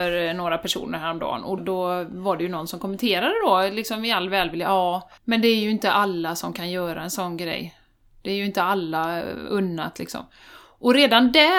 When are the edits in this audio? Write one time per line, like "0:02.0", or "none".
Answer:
0:01.6
0:05.2